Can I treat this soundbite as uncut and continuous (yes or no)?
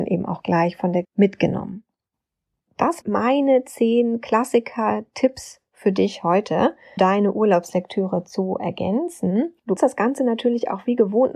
no